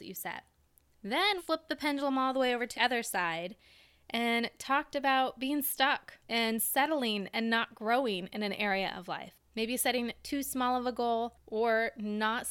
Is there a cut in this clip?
yes; 3 cuts; at 1.4 s, 2.7 s, 6.2 s

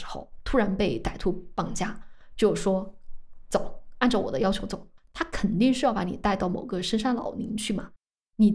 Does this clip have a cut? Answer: yes; 1 cut; at 5.0 s

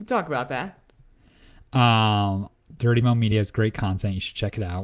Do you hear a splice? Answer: no; 0 cuts

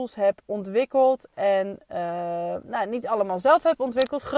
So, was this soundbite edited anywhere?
no; 0 cuts

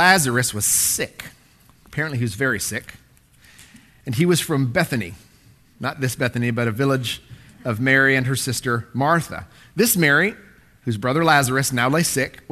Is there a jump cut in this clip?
no; 0 cuts

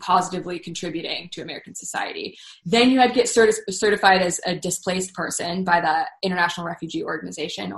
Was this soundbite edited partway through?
no; 0 cuts

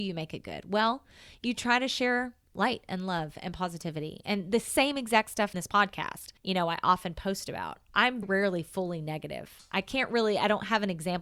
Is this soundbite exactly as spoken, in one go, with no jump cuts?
no; 3 cuts; at 5.5 s, 6.4 s, 8.2 s

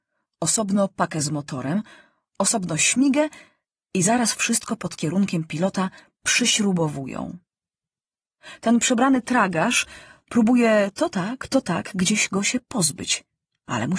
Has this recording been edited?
no; 0 cuts

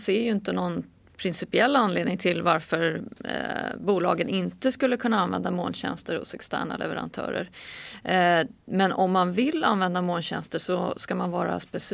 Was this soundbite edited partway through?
yes; 1 cut; at 8.6 s

